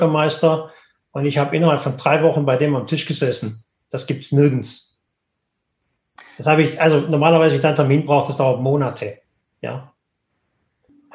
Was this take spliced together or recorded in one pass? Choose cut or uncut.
uncut